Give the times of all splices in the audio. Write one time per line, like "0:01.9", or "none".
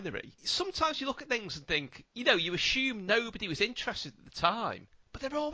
none